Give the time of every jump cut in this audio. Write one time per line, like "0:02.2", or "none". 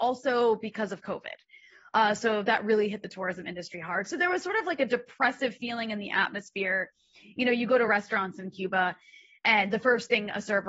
none